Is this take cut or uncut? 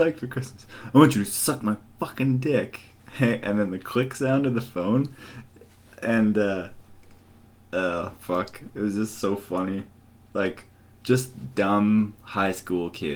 uncut